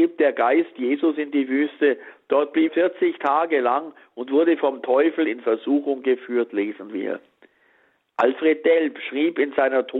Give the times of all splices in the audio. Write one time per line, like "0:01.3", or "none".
0:02.7